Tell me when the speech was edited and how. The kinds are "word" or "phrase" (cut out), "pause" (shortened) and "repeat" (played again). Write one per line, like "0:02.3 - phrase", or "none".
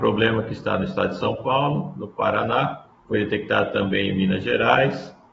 0:03.0 - pause